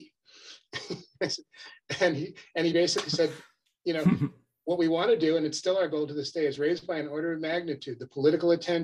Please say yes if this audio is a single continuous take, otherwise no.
yes